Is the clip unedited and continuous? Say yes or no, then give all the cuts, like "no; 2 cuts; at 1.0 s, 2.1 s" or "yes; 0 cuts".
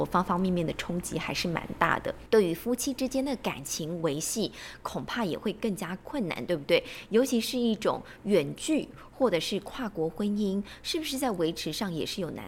no; 1 cut; at 2.3 s